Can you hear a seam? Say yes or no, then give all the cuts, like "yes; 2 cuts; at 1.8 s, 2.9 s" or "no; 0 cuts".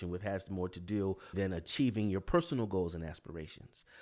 yes; 1 cut; at 1.3 s